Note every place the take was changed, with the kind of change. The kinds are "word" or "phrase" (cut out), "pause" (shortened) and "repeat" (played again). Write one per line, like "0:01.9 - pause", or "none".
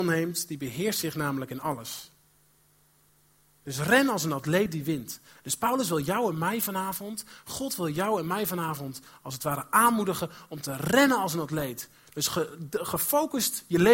none